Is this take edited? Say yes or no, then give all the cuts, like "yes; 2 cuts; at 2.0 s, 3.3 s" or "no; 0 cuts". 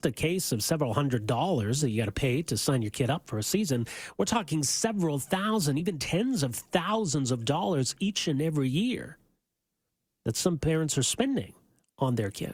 no; 0 cuts